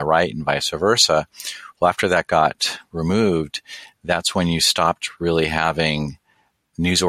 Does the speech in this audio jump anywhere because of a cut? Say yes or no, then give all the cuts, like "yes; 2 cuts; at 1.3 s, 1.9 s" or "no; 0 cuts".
no; 0 cuts